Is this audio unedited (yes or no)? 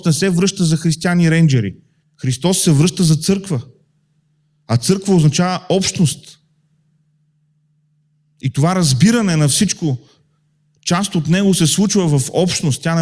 no